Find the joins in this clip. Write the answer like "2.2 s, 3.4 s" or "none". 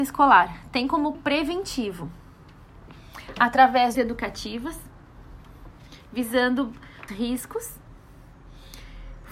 1.1 s, 3.9 s, 7.1 s